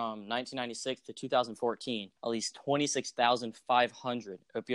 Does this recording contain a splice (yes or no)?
yes